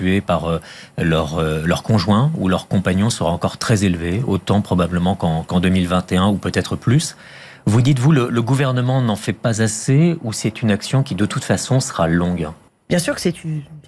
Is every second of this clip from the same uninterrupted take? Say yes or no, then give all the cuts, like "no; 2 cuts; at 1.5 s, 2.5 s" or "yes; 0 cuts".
no; 1 cut; at 12.7 s